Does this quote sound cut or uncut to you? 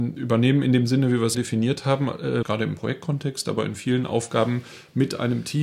cut